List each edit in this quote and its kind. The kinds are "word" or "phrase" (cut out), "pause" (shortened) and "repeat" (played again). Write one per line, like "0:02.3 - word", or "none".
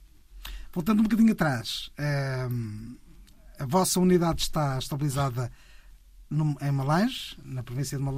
none